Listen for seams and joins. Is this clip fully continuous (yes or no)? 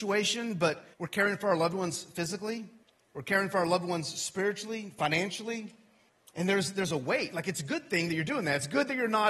no